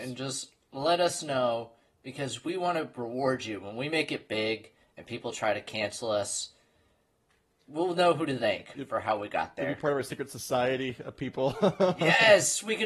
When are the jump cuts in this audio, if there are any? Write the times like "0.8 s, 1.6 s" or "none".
none